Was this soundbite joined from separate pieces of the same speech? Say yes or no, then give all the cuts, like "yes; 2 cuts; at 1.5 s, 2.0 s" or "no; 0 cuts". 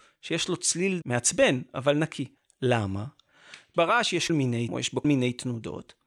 yes; 5 cuts; at 1.0 s, 2.4 s, 4.3 s, 4.7 s, 5.0 s